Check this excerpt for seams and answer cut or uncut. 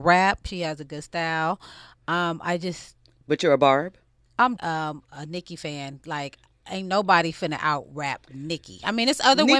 cut